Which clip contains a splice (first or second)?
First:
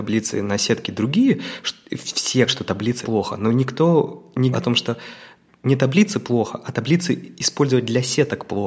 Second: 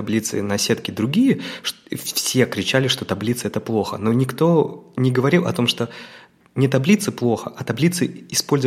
first